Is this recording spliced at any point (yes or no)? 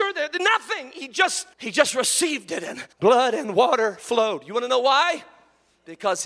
yes